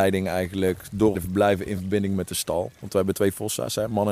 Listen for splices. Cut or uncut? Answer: cut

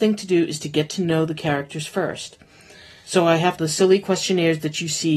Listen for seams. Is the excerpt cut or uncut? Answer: cut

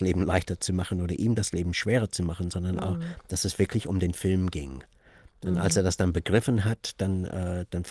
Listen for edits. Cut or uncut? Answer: uncut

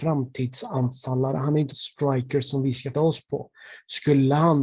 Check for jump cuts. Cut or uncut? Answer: cut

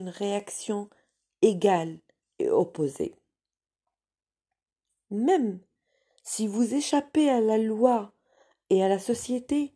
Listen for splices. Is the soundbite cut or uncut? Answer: uncut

